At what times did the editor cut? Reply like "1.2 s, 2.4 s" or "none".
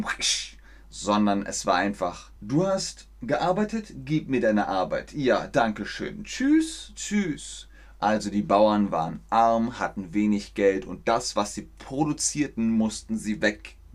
2.4 s